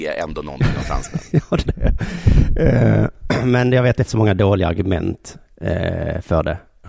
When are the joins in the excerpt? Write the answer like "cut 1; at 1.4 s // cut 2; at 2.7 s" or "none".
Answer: cut 1; at 1.6 s // cut 2; at 4.1 s